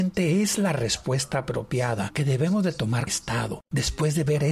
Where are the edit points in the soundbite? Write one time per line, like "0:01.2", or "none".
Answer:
0:03.1